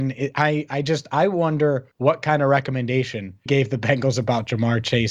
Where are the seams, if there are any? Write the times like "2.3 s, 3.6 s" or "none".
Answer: 1.9 s, 3.5 s